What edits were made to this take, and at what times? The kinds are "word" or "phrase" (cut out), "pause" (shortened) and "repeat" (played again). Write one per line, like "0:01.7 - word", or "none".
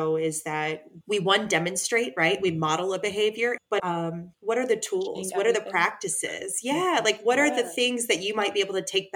0:01.0 - word
0:03.8 - word